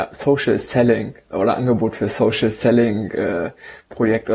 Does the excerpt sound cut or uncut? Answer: uncut